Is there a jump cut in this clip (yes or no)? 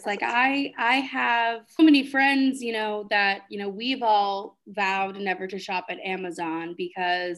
yes